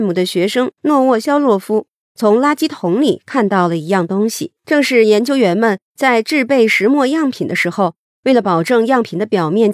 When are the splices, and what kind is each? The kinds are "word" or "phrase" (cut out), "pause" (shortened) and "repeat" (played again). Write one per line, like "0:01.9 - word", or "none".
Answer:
0:04.6 - pause